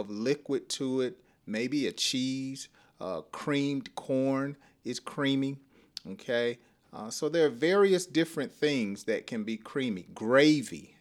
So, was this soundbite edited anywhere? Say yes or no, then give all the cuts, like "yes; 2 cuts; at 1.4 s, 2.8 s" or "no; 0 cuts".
no; 0 cuts